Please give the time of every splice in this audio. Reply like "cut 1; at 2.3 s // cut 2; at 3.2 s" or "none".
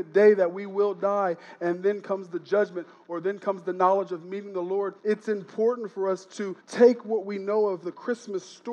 cut 1; at 5.0 s // cut 2; at 6.6 s